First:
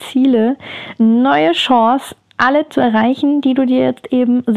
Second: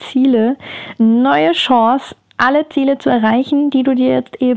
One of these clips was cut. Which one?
first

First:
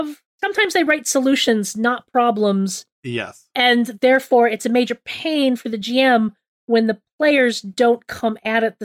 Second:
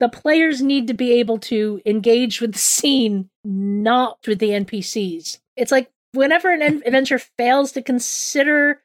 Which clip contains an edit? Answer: second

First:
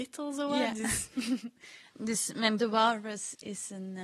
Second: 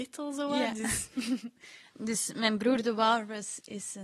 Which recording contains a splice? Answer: first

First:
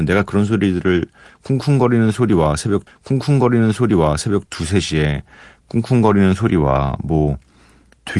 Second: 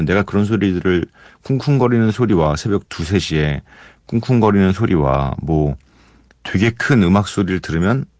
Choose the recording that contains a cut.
first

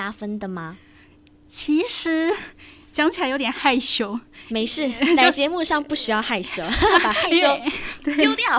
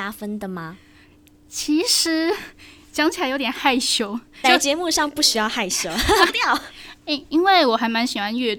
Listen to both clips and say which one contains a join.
second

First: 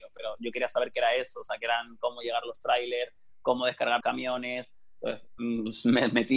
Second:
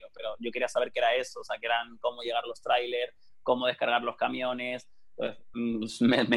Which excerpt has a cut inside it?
first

